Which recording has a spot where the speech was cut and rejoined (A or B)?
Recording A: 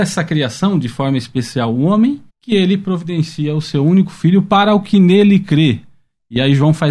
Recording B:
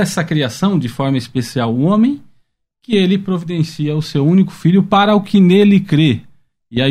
A